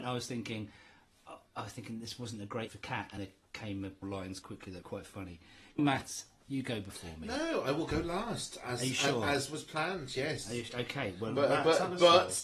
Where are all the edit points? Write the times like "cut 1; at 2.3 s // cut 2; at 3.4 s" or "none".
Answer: cut 1; at 2.7 s // cut 2; at 3.2 s // cut 3; at 4.0 s // cut 4; at 4.4 s // cut 5; at 4.8 s // cut 6; at 5.8 s